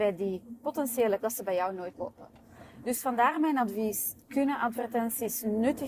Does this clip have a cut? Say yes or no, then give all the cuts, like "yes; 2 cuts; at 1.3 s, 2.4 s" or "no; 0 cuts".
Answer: yes; 3 cuts; at 1.2 s, 1.9 s, 4.2 s